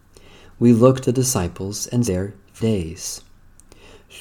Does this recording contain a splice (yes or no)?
yes